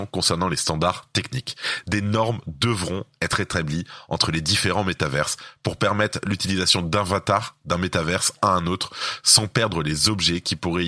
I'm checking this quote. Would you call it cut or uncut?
uncut